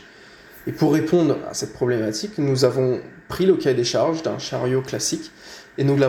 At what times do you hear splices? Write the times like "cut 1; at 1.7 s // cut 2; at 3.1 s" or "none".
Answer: none